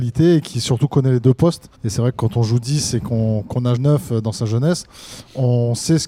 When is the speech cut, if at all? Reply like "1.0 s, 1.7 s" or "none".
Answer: 1.7 s, 3.8 s